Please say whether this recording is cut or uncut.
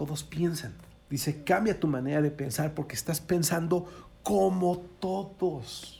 cut